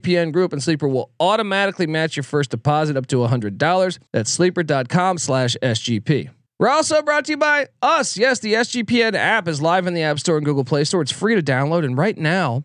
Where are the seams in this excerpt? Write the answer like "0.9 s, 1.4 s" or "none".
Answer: 4.1 s, 6.5 s